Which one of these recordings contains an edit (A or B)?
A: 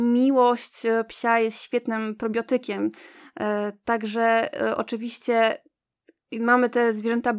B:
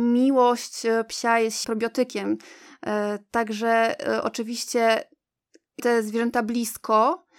B